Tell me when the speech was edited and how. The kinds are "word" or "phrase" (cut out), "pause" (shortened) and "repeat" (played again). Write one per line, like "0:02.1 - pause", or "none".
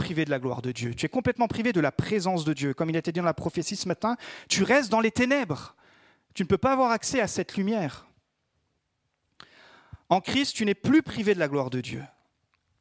none

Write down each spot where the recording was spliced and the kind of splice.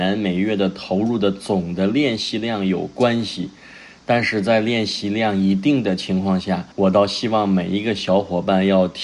0:06.7 - pause

